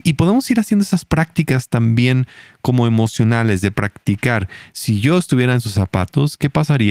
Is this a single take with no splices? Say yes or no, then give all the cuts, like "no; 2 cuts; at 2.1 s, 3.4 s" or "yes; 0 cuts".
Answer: yes; 0 cuts